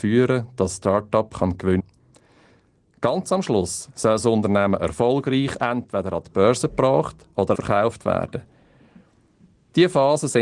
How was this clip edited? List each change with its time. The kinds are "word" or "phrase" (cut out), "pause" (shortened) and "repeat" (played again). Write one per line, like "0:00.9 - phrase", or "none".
0:01.8 - word
0:07.5 - word